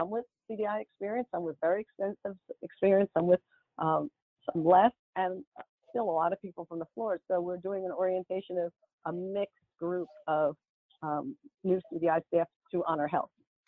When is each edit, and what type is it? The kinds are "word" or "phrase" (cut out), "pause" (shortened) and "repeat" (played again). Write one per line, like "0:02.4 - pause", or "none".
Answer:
none